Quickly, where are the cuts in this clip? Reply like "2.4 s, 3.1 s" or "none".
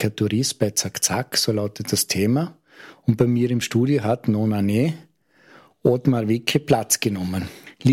none